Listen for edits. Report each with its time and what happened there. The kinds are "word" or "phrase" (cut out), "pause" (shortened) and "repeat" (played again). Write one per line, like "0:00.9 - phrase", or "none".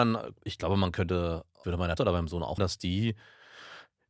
0:01.6 - word
0:02.0 - word
0:02.6 - word